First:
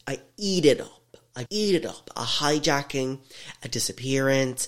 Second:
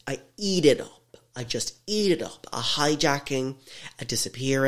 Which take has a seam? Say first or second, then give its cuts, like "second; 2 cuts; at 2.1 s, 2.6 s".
first; 1 cut; at 1.5 s